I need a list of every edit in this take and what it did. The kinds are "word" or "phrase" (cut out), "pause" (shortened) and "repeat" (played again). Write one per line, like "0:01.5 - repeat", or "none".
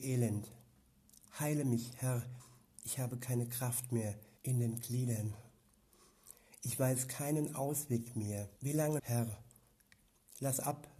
0:04.4 - pause
0:08.6 - pause
0:09.0 - word